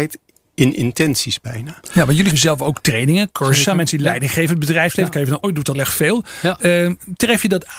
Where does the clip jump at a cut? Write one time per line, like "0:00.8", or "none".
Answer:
0:02.3
0:05.4
0:05.7